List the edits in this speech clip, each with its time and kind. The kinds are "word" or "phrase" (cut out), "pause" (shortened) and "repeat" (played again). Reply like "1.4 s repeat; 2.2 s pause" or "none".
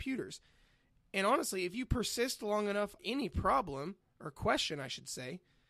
3.0 s word